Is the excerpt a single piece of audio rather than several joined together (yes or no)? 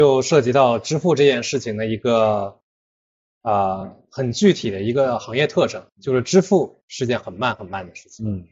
yes